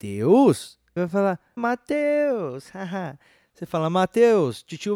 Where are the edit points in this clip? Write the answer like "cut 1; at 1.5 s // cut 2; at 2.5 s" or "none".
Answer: cut 1; at 1.0 s // cut 2; at 1.6 s

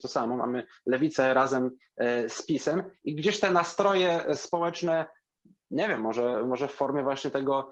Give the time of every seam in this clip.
none

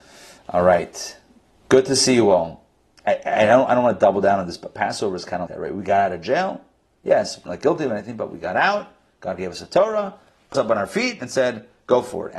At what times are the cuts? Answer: cut 1; at 5.5 s // cut 2; at 7.5 s // cut 3; at 10.5 s

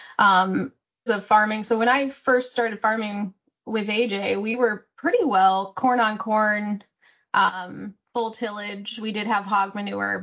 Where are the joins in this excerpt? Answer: cut 1; at 1.1 s // cut 2; at 8.0 s

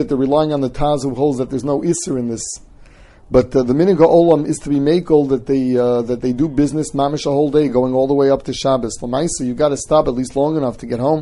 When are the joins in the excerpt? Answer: none

